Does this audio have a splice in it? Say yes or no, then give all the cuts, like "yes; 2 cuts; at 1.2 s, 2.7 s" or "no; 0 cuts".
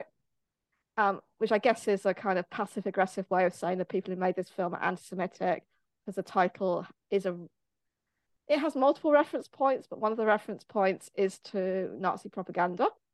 no; 0 cuts